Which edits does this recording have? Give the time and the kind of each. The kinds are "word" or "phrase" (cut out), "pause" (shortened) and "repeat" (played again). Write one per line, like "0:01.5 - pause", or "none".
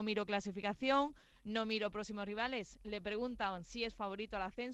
none